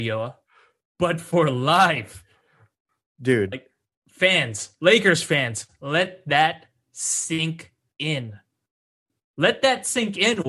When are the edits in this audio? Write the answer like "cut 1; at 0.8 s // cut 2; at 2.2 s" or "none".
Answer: cut 1; at 3.9 s